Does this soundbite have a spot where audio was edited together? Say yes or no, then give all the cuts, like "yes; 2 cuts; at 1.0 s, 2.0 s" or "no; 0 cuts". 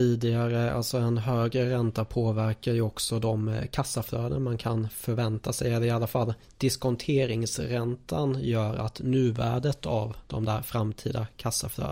no; 0 cuts